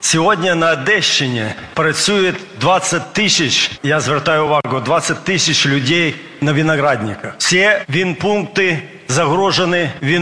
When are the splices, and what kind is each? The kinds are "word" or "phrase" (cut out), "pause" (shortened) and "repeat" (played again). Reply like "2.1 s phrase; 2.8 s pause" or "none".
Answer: none